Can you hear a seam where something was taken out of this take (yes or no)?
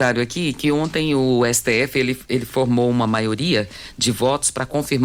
no